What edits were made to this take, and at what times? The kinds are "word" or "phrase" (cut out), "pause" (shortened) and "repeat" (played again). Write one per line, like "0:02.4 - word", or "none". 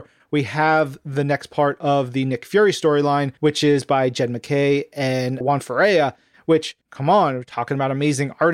0:03.4 - pause
0:05.4 - word
0:06.8 - pause